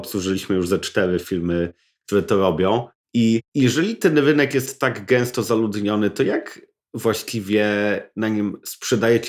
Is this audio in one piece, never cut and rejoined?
yes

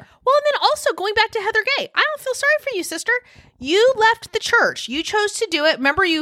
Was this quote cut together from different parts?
no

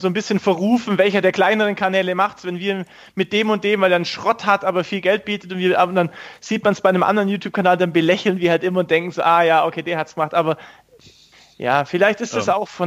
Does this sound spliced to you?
no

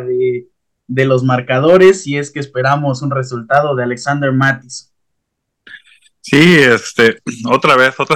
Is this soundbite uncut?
yes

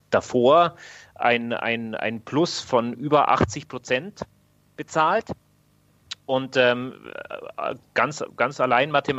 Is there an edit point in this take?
no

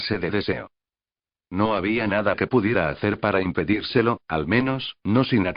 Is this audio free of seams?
yes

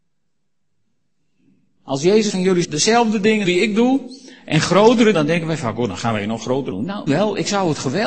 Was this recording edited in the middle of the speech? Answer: yes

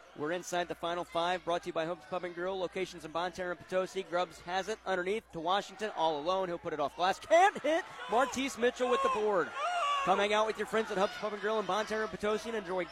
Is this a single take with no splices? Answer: yes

